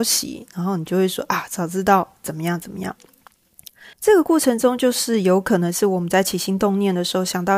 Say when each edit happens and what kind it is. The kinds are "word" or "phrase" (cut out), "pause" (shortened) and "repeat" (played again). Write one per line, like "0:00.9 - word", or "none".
0:03.9 - pause